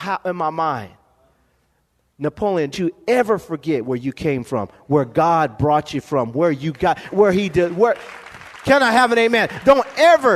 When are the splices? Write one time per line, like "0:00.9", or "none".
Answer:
0:02.7
0:07.1